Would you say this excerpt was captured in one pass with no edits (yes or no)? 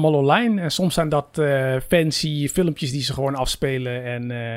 yes